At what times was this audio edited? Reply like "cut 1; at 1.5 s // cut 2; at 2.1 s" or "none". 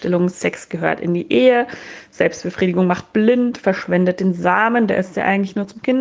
none